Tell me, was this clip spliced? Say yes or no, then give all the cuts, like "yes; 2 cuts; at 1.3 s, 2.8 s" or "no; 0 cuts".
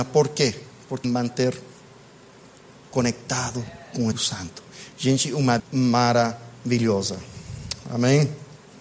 yes; 3 cuts; at 1.0 s, 4.1 s, 5.6 s